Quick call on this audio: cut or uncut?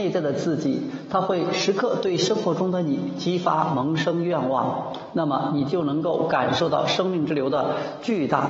uncut